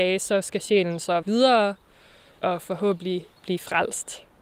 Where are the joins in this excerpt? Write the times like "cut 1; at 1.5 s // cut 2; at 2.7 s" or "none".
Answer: cut 1; at 1.2 s // cut 2; at 3.4 s

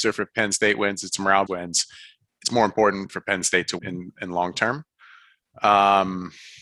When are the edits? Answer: cut 1; at 1.5 s // cut 2; at 3.1 s // cut 3; at 3.8 s

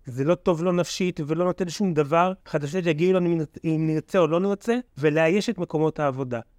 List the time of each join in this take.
cut 1; at 2.4 s // cut 2; at 4.9 s

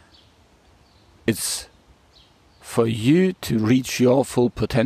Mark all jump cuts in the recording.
none

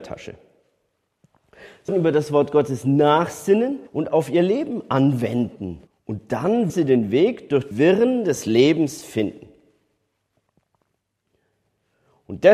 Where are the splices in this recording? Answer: cut 1; at 1.9 s // cut 2; at 3.9 s // cut 3; at 5.9 s // cut 4; at 6.7 s // cut 5; at 7.7 s

